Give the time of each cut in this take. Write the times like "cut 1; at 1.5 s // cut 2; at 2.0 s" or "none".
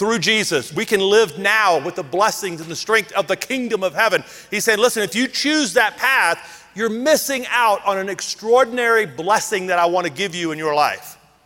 none